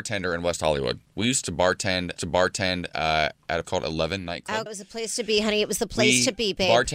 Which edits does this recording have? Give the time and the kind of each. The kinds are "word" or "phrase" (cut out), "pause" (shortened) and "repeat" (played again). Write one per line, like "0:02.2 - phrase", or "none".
0:01.1 - pause
0:02.2 - repeat
0:03.6 - word
0:04.7 - word